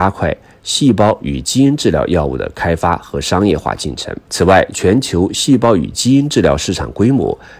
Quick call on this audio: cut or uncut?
cut